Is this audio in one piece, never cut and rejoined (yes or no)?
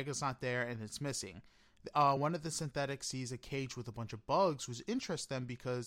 yes